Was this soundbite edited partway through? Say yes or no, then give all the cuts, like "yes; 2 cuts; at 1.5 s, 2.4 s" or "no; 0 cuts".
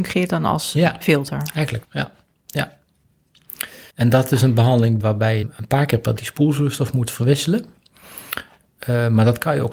yes; 5 cuts; at 1.8 s, 3.9 s, 5.0 s, 5.4 s, 6.2 s